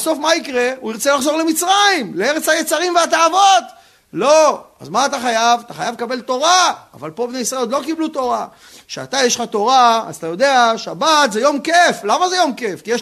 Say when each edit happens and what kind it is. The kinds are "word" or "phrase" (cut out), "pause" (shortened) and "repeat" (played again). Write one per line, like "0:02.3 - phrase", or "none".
none